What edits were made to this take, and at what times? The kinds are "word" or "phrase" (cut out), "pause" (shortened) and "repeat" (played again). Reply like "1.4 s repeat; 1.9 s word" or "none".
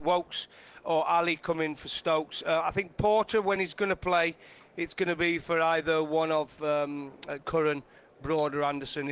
none